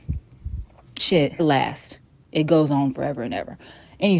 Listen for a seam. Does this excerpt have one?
yes; 2 cuts; at 1.0 s, 1.4 s

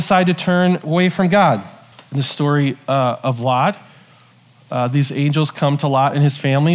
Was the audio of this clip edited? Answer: yes; 1 cut; at 1.9 s

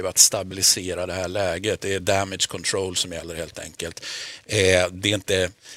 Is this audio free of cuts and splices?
yes; 0 cuts

